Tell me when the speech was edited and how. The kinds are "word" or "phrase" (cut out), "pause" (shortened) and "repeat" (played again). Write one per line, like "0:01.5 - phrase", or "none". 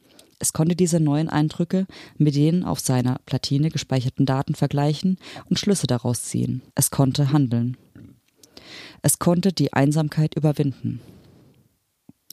0:06.7 - pause